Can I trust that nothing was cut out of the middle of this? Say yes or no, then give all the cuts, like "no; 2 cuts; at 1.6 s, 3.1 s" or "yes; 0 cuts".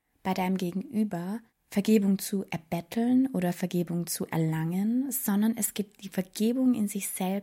no; 2 cuts; at 1.5 s, 6.0 s